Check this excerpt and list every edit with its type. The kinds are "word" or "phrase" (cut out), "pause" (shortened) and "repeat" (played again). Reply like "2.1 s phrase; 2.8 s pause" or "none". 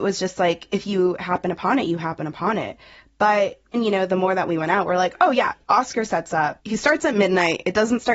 3.7 s word